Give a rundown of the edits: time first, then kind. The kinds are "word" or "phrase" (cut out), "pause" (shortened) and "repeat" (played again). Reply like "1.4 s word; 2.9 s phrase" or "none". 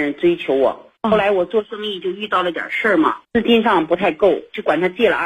1.0 s pause; 3.2 s pause